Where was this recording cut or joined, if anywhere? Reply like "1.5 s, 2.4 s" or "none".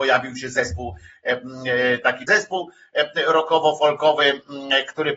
2.3 s